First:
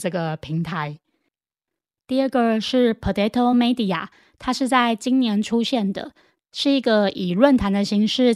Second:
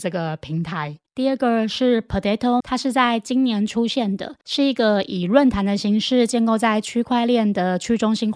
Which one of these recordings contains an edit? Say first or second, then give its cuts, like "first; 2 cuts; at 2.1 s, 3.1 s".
second; 3 cuts; at 1.1 s, 2.6 s, 4.4 s